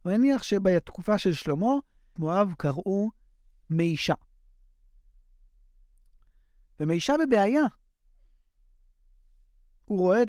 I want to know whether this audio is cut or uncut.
cut